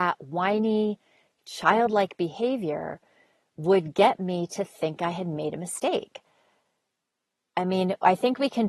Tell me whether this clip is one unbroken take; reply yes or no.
yes